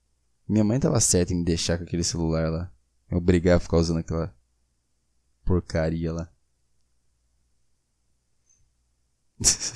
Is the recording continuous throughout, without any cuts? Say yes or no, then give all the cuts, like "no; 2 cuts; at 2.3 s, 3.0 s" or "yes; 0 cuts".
yes; 0 cuts